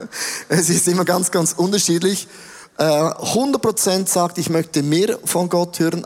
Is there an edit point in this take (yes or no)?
no